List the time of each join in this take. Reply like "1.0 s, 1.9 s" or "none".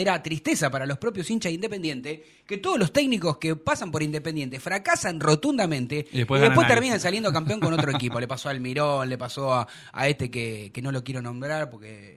none